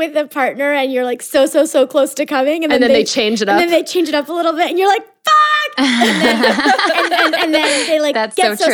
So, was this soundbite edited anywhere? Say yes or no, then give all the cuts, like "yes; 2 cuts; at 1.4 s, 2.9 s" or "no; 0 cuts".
no; 0 cuts